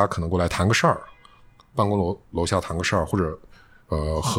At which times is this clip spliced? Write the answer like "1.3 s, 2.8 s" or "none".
none